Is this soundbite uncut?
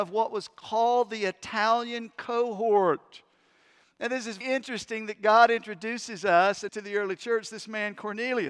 no; 2 cuts; at 4.4 s, 6.7 s

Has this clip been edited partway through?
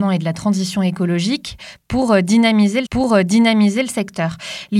yes; 1 cut; at 2.9 s

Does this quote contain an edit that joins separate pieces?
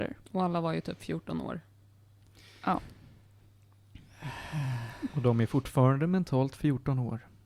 no; 0 cuts

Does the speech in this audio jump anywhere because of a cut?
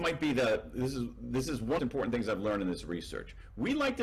yes; 1 cut; at 1.8 s

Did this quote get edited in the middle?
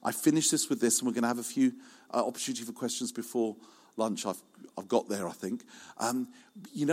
no; 0 cuts

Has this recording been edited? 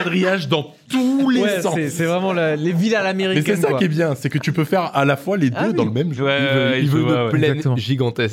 no; 0 cuts

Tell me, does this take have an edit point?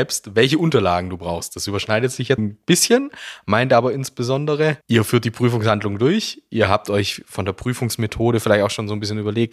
yes; 2 cuts; at 2.4 s, 4.8 s

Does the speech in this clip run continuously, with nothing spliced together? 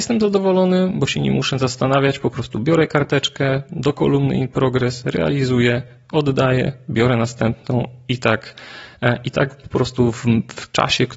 yes; 0 cuts

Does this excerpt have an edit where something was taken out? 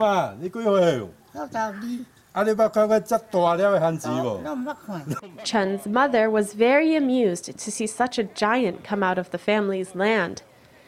no; 0 cuts

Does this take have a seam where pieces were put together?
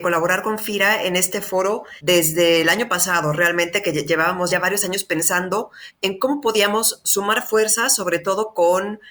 yes; 1 cut; at 4.5 s

